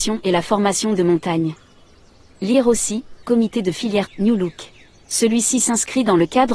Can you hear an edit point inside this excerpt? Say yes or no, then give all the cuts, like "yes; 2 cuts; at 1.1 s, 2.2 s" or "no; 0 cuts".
yes; 4 cuts; at 1.0 s, 3.2 s, 4.1 s, 4.9 s